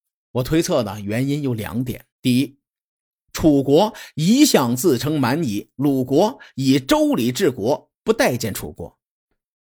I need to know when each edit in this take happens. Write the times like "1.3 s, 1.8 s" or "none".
2.1 s